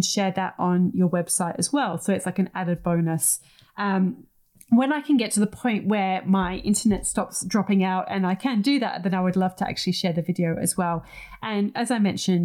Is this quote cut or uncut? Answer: uncut